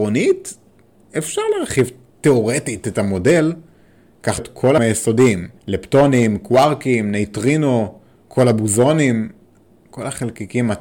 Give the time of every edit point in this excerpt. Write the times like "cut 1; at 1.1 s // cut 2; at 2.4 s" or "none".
cut 1; at 4.4 s // cut 2; at 4.8 s // cut 3; at 5.6 s